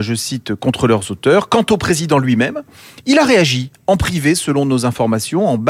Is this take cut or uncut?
uncut